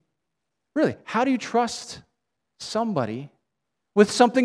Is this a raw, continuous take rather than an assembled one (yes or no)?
yes